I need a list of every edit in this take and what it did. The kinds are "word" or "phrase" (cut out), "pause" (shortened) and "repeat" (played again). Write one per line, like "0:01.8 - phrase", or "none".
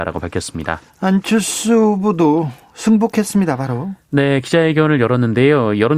none